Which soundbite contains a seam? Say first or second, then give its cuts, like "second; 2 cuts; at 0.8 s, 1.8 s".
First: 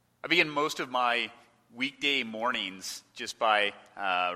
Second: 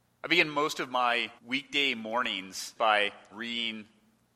second; 3 cuts; at 1.4 s, 2.8 s, 3.3 s